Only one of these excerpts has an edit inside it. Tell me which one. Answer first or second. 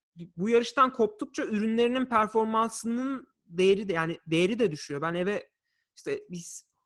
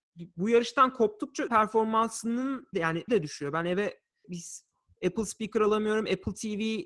second